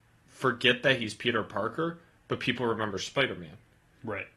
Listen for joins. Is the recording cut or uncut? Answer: uncut